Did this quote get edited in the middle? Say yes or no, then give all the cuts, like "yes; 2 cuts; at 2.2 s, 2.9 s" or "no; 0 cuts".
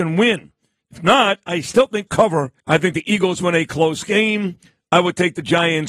yes; 2 cuts; at 2.1 s, 2.6 s